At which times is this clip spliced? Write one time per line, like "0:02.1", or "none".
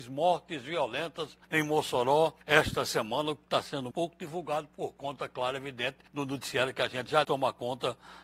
0:01.4
0:02.4
0:03.9
0:06.1
0:07.2